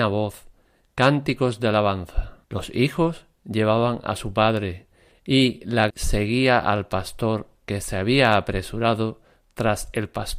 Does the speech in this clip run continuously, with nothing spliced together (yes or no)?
no